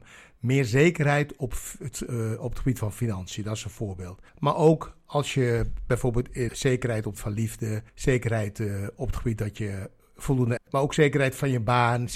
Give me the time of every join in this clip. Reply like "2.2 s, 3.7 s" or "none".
4.3 s, 6.5 s, 7.1 s, 7.9 s, 10.6 s